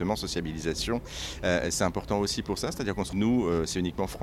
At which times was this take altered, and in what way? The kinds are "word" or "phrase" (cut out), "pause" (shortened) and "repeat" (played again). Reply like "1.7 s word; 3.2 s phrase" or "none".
3.1 s word

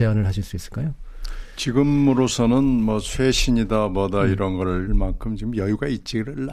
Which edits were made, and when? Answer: 4.9 s word

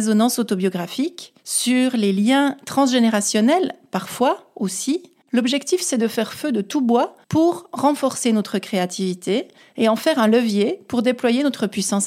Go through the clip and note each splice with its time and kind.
1.4 s pause; 7.2 s pause

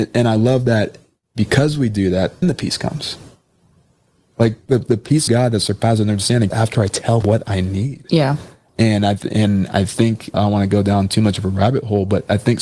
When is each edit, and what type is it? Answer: 2.4 s word; 5.3 s word; 6.5 s word; 7.2 s word; 10.3 s word

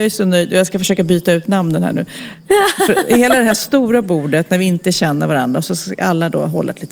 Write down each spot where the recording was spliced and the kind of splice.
none

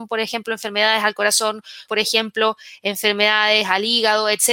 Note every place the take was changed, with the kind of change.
1.9 s word

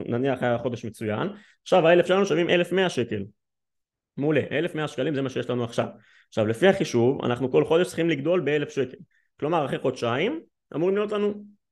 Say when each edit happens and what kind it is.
2.1 s word

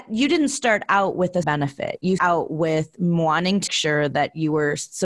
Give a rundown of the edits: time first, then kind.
1.4 s word; 2.2 s word; 3.7 s word

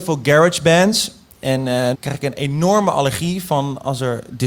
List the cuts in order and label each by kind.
1.9 s word

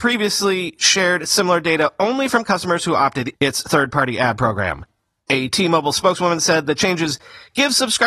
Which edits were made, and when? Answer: 3.3 s word

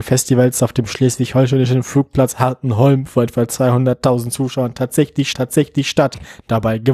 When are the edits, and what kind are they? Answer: 5.3 s repeat

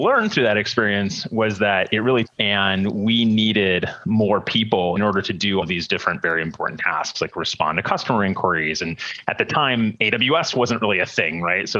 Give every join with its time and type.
2.3 s phrase; 5.0 s phrase; 5.6 s word

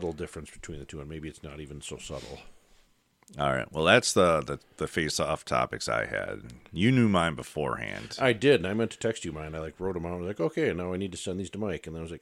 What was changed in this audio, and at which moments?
none

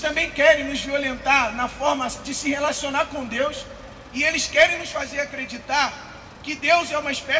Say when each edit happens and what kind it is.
none

